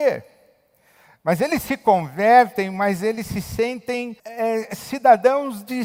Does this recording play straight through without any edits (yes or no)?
no